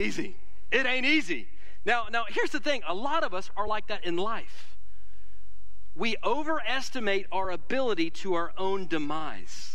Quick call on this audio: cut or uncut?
uncut